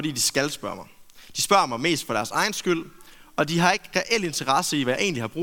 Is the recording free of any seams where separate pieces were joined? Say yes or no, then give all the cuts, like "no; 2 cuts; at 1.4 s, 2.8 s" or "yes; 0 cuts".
yes; 0 cuts